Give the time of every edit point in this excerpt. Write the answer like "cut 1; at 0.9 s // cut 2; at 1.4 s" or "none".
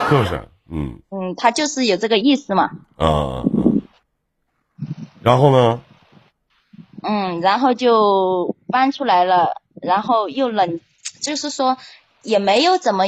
cut 1; at 1.0 s // cut 2; at 5.1 s